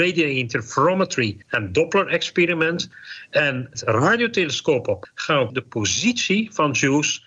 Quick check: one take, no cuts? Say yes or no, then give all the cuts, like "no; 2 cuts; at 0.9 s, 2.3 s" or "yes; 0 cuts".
no; 4 cuts; at 1.4 s, 3.7 s, 5.0 s, 5.5 s